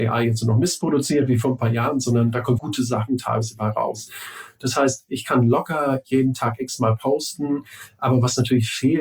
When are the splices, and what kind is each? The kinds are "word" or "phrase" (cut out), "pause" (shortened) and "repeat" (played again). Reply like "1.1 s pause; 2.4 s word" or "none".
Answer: 2.6 s word